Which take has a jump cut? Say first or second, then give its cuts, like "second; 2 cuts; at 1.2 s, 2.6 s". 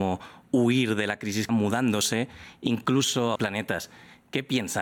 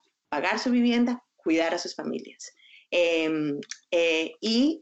first; 2 cuts; at 1.5 s, 3.3 s